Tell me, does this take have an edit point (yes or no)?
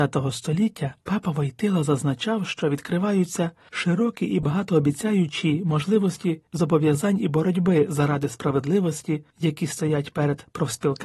yes